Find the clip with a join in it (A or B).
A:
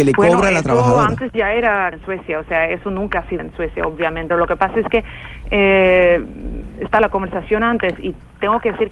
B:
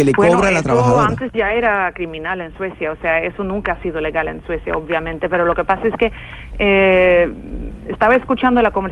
A